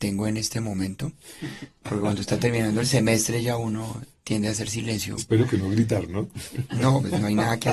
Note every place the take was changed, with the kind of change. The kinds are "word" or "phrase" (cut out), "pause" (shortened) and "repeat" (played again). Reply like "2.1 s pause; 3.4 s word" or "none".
none

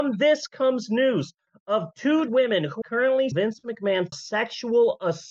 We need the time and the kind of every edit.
2.3 s word; 2.8 s word; 3.3 s word; 4.1 s word

